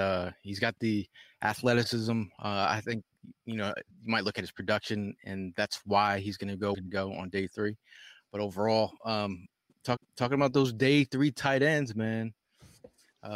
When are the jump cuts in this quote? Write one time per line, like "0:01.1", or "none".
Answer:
0:03.9
0:06.7
0:10.0